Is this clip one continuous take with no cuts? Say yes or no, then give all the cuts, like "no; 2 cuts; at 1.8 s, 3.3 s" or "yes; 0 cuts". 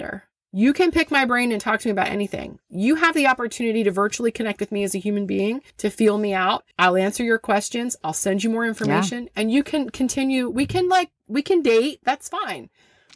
no; 2 cuts; at 5.7 s, 6.7 s